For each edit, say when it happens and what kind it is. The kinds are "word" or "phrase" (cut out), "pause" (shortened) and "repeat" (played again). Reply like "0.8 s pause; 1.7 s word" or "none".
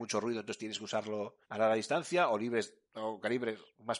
1.4 s pause